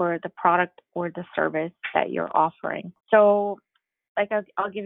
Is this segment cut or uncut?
cut